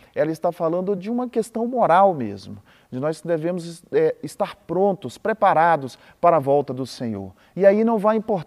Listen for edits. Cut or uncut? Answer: uncut